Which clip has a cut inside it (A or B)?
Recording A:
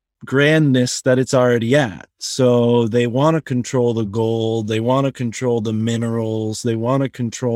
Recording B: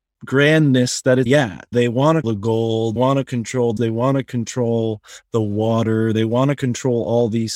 B